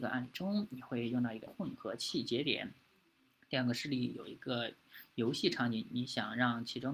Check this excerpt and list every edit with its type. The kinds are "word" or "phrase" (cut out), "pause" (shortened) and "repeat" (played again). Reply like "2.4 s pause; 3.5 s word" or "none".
1.5 s word